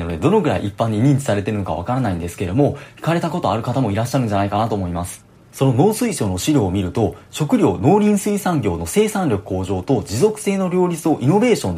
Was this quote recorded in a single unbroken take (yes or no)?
yes